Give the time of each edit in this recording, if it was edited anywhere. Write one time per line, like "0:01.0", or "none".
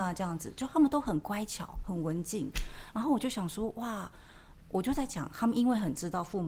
none